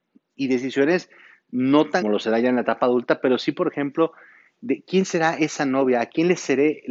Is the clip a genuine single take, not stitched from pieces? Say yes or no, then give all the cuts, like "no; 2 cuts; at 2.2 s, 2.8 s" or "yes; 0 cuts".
no; 1 cut; at 2.0 s